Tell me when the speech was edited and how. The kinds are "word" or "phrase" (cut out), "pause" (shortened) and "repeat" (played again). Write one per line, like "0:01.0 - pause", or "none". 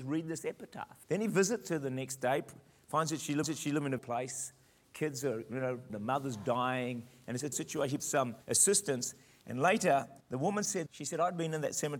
0:01.0 - pause
0:03.4 - repeat
0:04.0 - phrase
0:05.9 - word
0:07.5 - word
0:08.0 - phrase
0:08.4 - pause
0:10.2 - pause
0:10.9 - word

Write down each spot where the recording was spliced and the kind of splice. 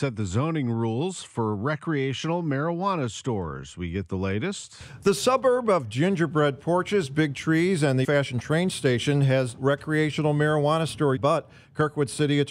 0:08.0 - word
0:09.6 - word
0:11.2 - word

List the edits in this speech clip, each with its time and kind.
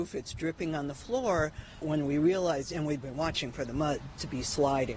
0:01.8 - word

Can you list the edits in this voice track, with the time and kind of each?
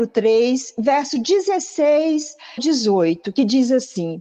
0:02.6 - word

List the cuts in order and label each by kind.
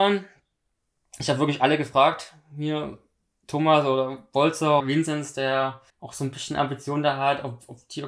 0:04.8 - word
0:05.9 - pause

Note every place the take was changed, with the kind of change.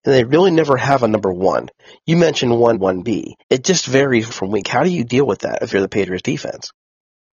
0:02.7 - word
0:03.4 - pause
0:04.3 - word

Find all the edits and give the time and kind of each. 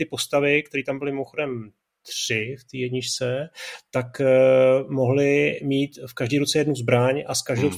none

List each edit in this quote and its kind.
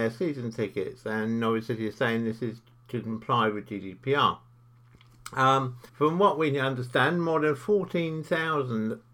0:05.9 - pause

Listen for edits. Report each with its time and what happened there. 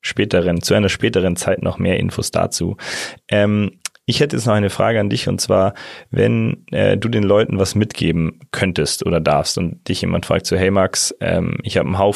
none

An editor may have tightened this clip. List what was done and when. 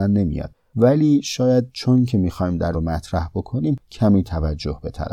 0:02.7 - phrase

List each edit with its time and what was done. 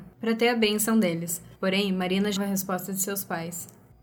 0:01.6 - pause
0:02.4 - word

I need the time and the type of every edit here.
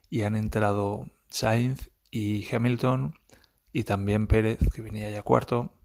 none

